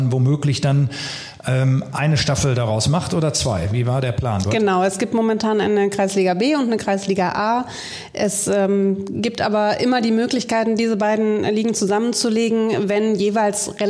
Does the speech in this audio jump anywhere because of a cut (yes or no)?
no